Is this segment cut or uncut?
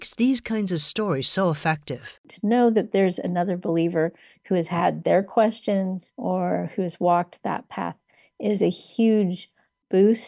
uncut